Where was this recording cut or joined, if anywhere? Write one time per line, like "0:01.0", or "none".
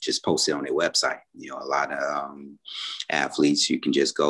none